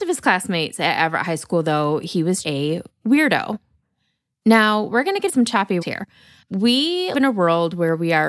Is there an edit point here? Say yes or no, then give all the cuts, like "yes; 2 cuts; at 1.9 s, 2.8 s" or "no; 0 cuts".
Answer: yes; 4 cuts; at 2.4 s, 5.3 s, 5.8 s, 7.1 s